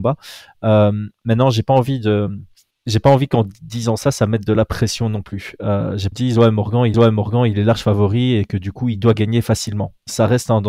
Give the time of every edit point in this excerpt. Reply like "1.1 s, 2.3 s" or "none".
2.7 s, 6.1 s, 6.9 s